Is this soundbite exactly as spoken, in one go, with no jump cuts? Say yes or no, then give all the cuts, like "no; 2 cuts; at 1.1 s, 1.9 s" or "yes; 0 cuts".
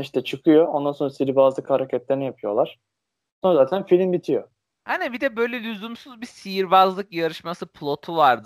yes; 0 cuts